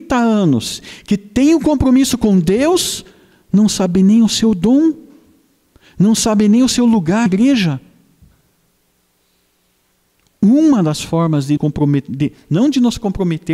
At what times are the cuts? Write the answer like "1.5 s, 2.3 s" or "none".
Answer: 7.3 s, 11.6 s